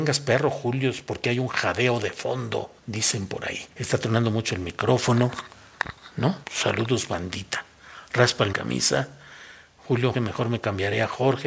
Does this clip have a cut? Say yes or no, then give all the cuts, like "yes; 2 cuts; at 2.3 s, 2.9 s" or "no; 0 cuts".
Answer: yes; 5 cuts; at 2.8 s, 3.7 s, 6.4 s, 8.5 s, 10.1 s